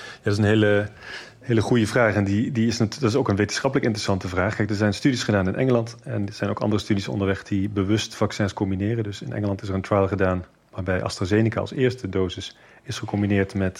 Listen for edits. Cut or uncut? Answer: uncut